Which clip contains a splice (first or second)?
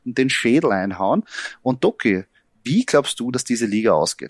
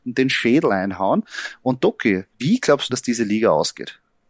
second